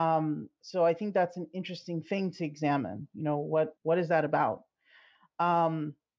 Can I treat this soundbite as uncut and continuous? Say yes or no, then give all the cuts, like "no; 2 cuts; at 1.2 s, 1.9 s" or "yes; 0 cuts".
no; 1 cut; at 3.8 s